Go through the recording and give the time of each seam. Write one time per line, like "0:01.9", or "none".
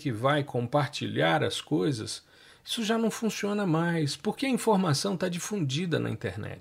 none

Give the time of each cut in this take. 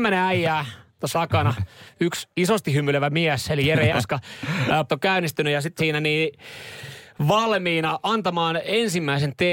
0:01.1
0:02.3
0:03.9
0:04.9
0:05.8

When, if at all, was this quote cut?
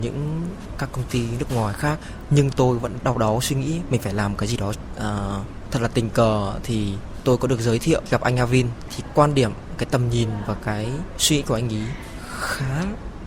0:03.0

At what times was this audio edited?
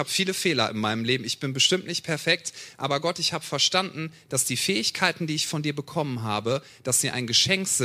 none

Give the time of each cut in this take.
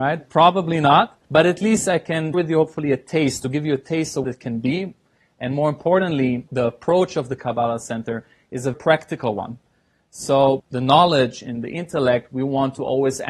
0:01.2
0:02.3
0:04.2
0:06.5
0:08.7
0:10.6

